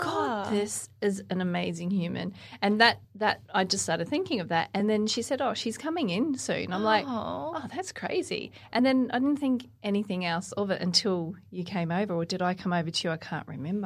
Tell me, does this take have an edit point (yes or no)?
no